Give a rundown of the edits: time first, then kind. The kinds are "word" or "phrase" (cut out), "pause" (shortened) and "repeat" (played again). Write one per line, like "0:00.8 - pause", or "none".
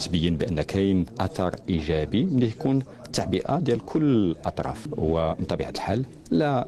none